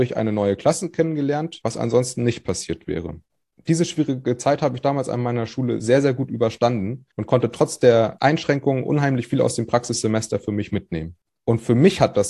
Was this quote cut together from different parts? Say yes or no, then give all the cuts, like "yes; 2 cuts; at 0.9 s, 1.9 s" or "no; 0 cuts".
no; 0 cuts